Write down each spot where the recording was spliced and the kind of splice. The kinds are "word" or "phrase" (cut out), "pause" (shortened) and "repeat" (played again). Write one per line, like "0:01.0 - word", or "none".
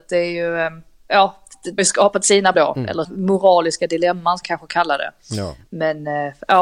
0:01.8 - word
0:02.5 - word
0:03.0 - word
0:04.4 - word